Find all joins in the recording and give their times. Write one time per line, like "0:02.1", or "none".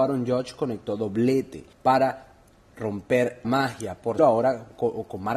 0:01.7
0:03.4
0:04.2